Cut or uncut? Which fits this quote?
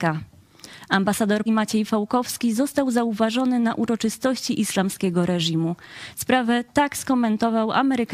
cut